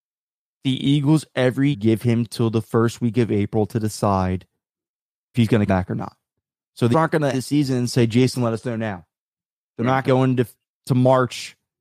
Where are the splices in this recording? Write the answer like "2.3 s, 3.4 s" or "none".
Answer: 1.7 s, 5.3 s, 5.7 s, 6.9 s, 7.3 s, 10.0 s

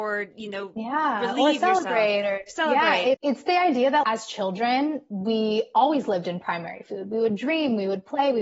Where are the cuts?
3.1 s, 4.0 s

